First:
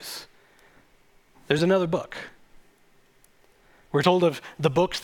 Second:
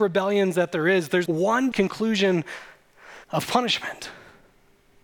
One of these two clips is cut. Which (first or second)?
second